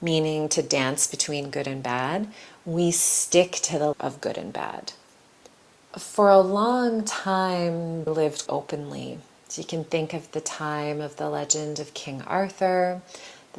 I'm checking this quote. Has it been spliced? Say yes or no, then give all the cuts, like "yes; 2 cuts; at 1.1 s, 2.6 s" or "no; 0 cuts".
yes; 3 cuts; at 3.9 s, 8.1 s, 8.5 s